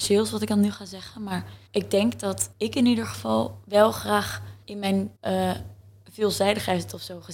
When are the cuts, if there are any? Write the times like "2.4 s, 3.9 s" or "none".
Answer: 1.7 s, 2.5 s, 4.6 s, 5.1 s